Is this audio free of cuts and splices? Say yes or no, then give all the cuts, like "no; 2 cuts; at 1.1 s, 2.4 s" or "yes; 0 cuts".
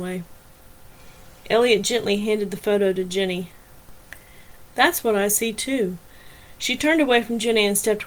yes; 0 cuts